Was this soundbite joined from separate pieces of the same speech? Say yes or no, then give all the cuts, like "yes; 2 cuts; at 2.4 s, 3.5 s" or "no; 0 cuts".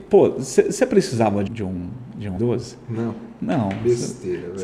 yes; 2 cuts; at 1.5 s, 2.4 s